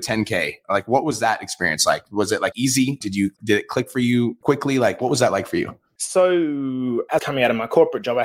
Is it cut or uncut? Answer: cut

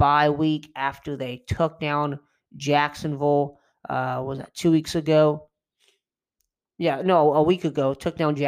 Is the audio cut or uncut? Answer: uncut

